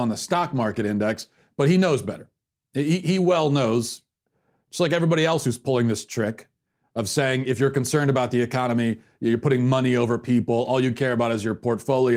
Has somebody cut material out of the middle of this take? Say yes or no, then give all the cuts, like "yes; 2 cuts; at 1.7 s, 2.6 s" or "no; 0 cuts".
no; 0 cuts